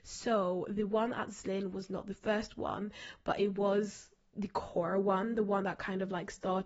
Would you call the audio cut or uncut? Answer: uncut